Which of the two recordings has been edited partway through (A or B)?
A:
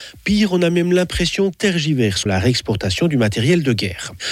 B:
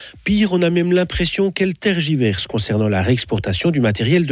A